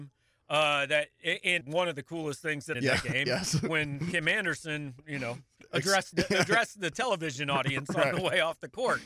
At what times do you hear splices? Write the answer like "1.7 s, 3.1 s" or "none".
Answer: 1.6 s, 2.7 s, 5.6 s, 6.1 s